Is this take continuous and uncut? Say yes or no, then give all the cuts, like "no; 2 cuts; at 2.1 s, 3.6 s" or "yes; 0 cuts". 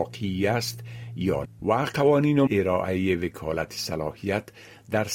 no; 2 cuts; at 1.4 s, 2.5 s